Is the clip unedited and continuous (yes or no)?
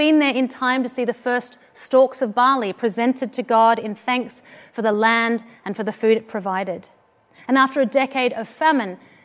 yes